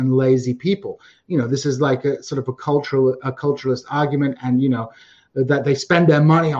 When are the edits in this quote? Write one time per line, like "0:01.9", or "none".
none